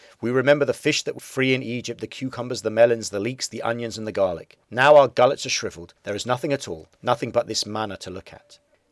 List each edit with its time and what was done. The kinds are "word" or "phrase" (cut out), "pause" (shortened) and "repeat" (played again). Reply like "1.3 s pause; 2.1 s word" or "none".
1.2 s phrase; 4.6 s pause; 6.0 s pause; 6.9 s pause